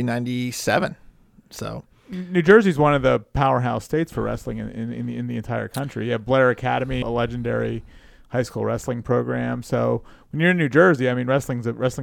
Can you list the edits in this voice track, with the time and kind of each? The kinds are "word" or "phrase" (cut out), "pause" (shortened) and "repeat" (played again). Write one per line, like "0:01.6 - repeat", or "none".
0:07.0 - word